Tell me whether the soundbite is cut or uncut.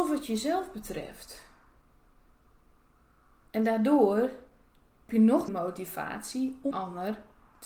cut